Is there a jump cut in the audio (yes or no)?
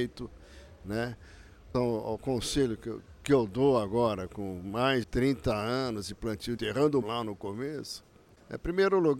yes